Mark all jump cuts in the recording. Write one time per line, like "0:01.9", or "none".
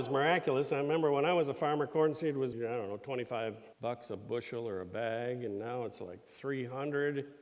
0:02.5
0:03.7

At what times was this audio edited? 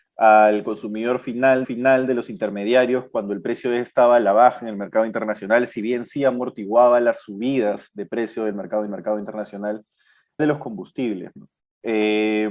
0:01.6
0:08.9
0:10.4
0:11.6

